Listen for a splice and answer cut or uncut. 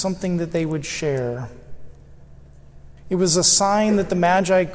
cut